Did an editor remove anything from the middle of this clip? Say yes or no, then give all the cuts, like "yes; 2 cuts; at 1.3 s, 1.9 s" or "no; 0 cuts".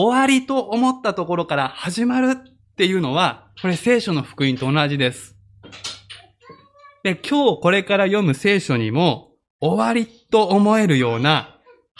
no; 0 cuts